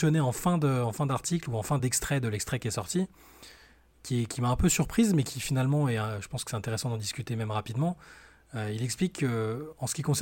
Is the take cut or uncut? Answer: uncut